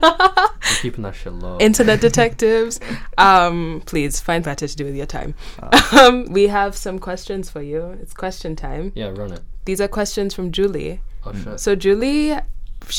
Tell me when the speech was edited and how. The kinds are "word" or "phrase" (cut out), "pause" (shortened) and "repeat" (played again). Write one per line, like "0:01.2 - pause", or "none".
0:04.4 - word
0:06.3 - word